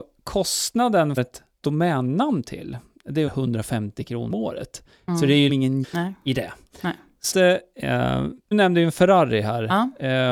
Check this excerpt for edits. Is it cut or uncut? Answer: cut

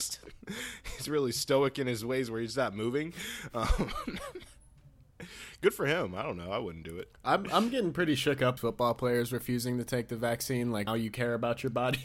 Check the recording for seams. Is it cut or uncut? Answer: cut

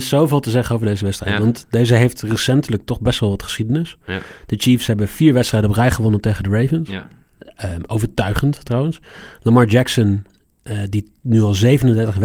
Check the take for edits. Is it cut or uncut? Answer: uncut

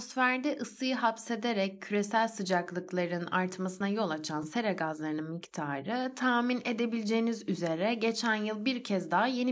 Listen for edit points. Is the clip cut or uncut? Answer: uncut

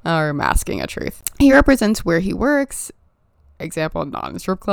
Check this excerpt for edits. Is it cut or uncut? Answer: uncut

